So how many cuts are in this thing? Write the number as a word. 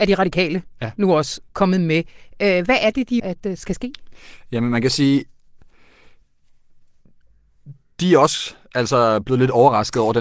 two